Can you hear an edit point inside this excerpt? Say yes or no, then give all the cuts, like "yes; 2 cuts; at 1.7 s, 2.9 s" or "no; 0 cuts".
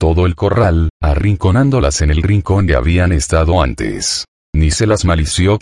yes; 2 cuts; at 2.7 s, 4.3 s